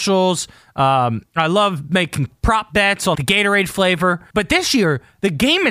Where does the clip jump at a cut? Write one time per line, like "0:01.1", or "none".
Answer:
0:03.1
0:04.3